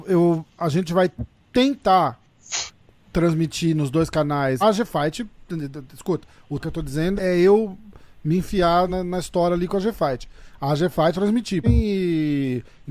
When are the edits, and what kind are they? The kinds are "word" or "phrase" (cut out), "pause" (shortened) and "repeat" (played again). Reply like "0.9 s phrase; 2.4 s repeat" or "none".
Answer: 4.6 s word; 6.6 s word; 7.2 s word; 8.9 s word; 11.1 s word; 11.6 s word